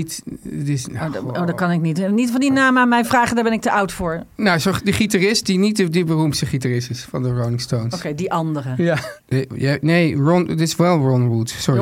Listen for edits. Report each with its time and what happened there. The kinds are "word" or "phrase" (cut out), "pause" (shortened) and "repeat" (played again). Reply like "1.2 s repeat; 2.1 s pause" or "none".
none